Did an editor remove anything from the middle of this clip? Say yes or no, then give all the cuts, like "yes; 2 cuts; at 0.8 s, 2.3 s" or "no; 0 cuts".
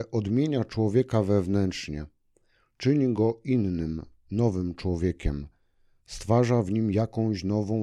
no; 0 cuts